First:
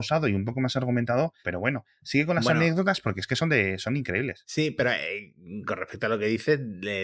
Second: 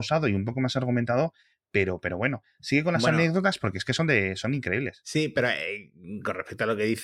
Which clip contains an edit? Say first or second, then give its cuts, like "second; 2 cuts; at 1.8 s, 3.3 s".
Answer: first; 1 cut; at 1.4 s